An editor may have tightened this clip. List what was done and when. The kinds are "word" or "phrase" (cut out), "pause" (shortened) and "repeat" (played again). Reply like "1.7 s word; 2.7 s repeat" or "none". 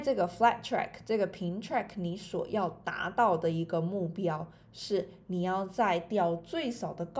none